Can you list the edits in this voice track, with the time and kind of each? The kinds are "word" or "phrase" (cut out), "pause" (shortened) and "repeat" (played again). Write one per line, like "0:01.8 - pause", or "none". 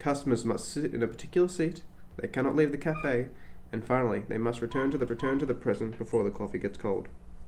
0:05.1 - repeat